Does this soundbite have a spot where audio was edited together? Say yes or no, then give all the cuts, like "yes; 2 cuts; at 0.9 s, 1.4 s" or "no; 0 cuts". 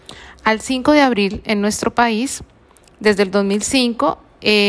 no; 0 cuts